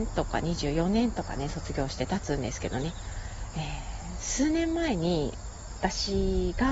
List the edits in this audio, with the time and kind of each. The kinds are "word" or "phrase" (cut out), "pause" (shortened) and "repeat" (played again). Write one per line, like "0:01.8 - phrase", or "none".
none